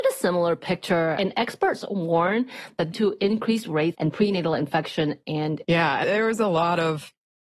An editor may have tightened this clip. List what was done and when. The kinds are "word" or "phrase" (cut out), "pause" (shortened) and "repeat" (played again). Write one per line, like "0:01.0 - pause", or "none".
0:02.9 - phrase
0:03.9 - phrase
0:05.6 - word
0:06.0 - word